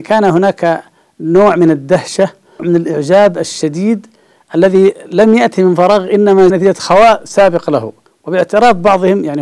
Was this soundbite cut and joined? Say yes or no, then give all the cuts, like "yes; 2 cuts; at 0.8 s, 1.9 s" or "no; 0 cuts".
yes; 3 cuts; at 2.6 s, 6.5 s, 8.1 s